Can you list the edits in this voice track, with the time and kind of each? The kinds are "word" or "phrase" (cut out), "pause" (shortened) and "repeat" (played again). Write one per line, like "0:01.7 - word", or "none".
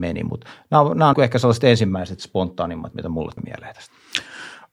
0:01.1 - word
0:02.9 - word
0:03.4 - word